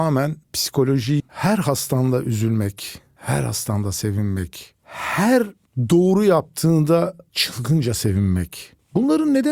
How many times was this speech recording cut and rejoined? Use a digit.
1